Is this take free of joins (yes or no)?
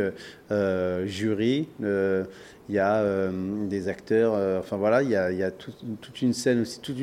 yes